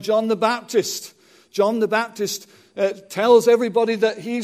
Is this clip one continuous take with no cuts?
yes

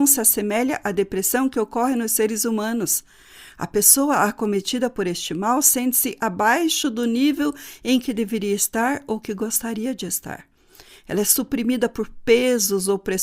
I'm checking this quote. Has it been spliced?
no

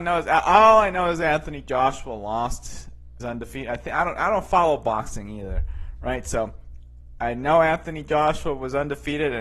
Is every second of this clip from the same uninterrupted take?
no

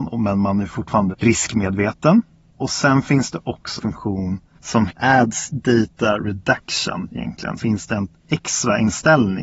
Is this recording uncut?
no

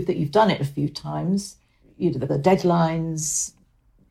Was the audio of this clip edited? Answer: yes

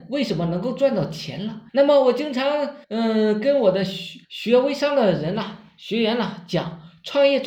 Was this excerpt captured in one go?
no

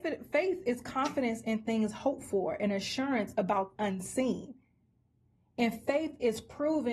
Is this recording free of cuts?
no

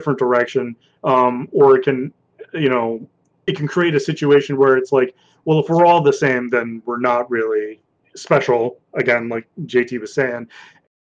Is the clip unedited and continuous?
yes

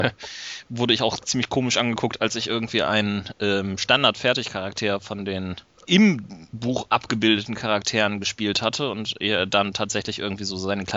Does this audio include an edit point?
no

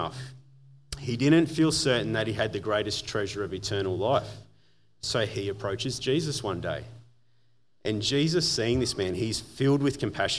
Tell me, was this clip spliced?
no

